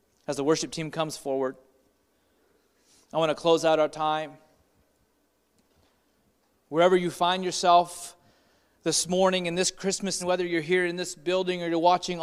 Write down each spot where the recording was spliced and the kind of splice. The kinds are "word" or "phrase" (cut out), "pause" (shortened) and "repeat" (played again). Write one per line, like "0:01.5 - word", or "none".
0:10.2 - word